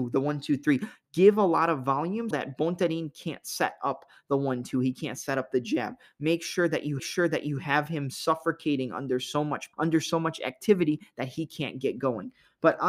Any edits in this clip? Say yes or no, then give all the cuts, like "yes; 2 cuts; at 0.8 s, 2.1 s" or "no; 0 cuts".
yes; 3 cuts; at 2.3 s, 7.0 s, 9.7 s